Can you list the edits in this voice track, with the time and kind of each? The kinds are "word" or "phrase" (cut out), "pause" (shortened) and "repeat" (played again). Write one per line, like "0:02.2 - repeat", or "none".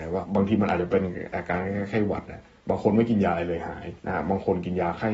0:04.0 - pause